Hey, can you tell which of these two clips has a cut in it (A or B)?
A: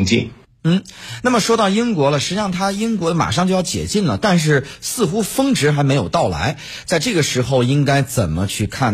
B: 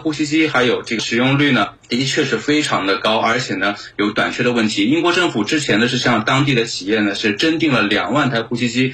B